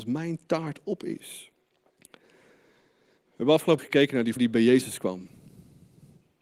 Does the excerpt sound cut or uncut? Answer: cut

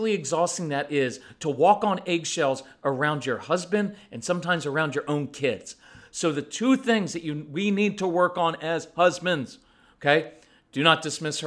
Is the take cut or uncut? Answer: uncut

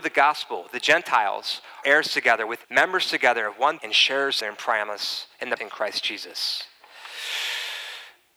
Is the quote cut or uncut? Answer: cut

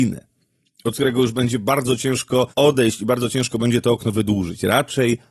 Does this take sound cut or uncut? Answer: cut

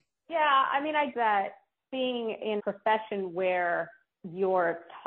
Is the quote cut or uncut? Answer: cut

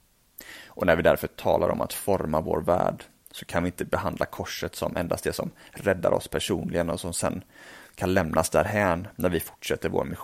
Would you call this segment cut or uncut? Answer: uncut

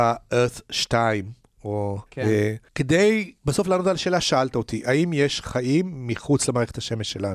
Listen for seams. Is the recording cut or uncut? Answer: cut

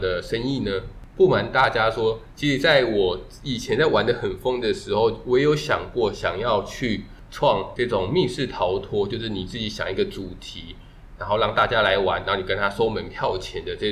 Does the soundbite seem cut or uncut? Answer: uncut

